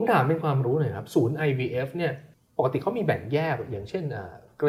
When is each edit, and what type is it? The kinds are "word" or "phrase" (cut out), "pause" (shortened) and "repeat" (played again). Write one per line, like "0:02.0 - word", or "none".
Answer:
0:02.3 - pause